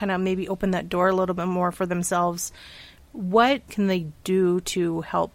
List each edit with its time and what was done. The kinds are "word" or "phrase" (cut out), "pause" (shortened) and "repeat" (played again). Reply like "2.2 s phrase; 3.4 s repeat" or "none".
3.7 s phrase